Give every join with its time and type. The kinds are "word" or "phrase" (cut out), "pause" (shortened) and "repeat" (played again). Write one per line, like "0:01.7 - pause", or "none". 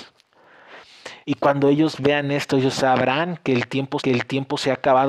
0:01.2 - pause
0:04.0 - repeat